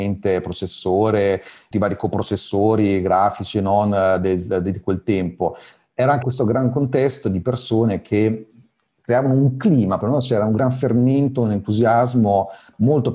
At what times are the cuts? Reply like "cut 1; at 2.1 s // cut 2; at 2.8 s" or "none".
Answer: cut 1; at 1.7 s // cut 2; at 6.2 s // cut 3; at 10.0 s